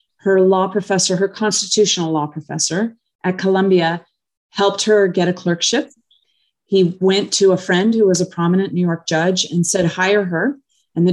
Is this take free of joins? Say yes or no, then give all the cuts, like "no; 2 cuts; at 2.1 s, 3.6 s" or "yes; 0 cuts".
yes; 0 cuts